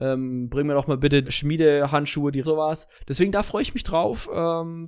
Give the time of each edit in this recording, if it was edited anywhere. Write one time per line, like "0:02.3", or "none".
0:01.2
0:02.4
0:03.0